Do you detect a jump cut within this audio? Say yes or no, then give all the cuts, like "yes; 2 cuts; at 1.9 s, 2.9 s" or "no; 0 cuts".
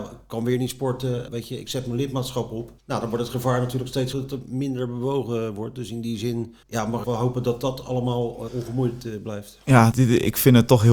yes; 7 cuts; at 1.3 s, 2.8 s, 4.1 s, 6.6 s, 7.0 s, 8.5 s, 9.9 s